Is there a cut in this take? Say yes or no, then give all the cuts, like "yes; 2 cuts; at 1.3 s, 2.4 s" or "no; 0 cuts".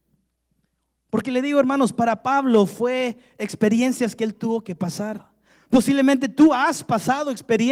no; 0 cuts